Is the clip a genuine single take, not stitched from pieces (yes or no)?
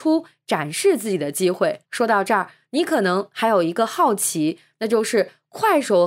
no